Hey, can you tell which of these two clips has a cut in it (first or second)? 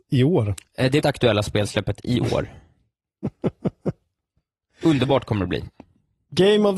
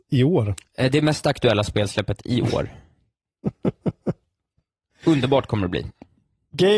first